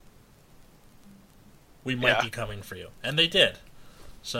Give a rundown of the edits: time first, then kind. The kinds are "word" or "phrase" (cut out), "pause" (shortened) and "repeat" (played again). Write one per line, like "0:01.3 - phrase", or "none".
none

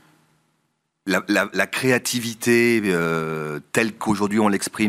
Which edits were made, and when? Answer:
0:01.5 - word

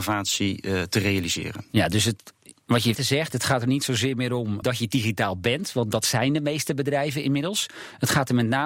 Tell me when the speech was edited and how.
0:02.9 - word
0:04.6 - word

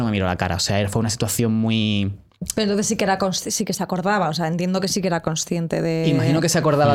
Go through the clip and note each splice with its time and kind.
none

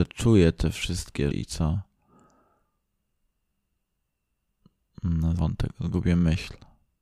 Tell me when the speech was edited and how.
0:01.3 - word
0:05.4 - word

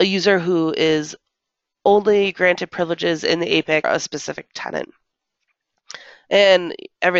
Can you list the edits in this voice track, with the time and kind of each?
0:03.8 - word

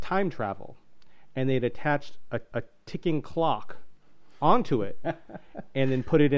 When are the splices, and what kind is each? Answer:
0:02.5 - repeat

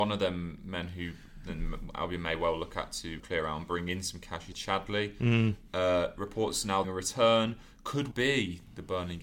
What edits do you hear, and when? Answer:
0:03.2 - word
0:04.5 - word
0:06.8 - phrase
0:08.1 - word

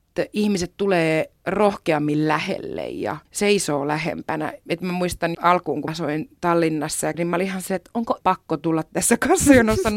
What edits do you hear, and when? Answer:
0:03.3 - pause
0:05.3 - word
0:05.9 - word
0:07.1 - phrase
0:08.2 - word

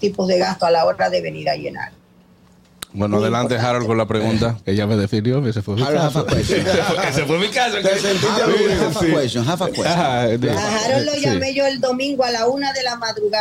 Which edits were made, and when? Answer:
none

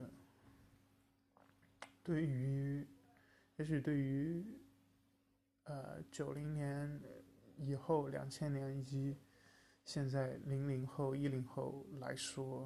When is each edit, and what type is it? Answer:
none

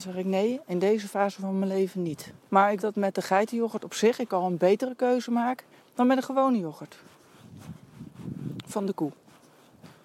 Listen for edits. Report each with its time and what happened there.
0:02.4 - pause
0:02.8 - word
0:05.7 - pause

